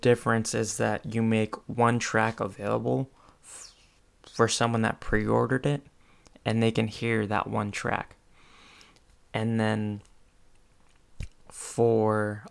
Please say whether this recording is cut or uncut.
uncut